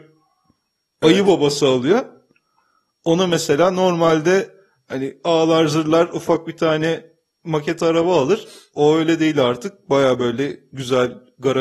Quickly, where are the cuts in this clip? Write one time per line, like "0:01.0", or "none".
none